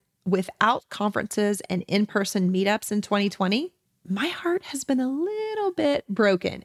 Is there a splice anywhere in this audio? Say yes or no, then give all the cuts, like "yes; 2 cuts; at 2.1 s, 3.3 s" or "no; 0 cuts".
no; 0 cuts